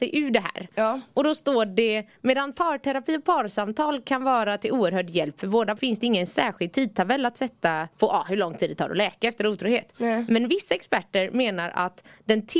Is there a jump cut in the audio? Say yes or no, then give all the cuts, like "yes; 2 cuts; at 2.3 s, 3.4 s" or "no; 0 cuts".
yes; 2 cuts; at 5.8 s, 7.9 s